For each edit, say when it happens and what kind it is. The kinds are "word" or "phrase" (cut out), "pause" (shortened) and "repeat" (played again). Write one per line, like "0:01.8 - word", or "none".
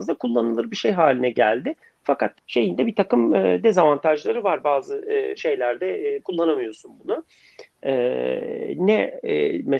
0:02.3 - word

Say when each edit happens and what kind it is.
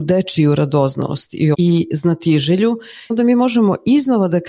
0:01.5 - word
0:03.1 - word

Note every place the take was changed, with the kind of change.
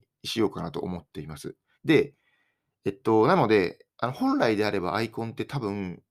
0:01.7 - pause
0:03.9 - pause

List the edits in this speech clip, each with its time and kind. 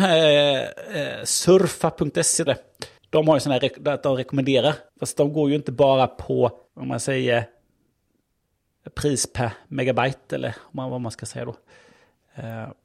0:02.5 - word
0:03.0 - pause
0:04.9 - pause
0:06.7 - pause

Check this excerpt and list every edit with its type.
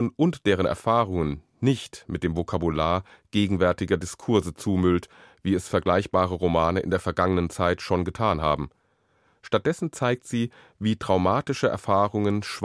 none

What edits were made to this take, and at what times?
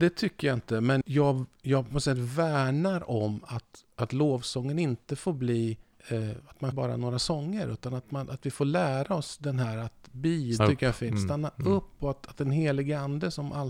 0:01.0 - word
0:05.9 - pause
0:06.7 - word
0:10.6 - word

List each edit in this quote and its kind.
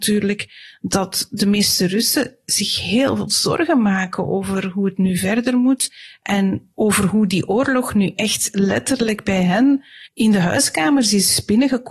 0:06.7 - pause
0:10.1 - pause

